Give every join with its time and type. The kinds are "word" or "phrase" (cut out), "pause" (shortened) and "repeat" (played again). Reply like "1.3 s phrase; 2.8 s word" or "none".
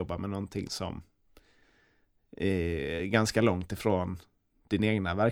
none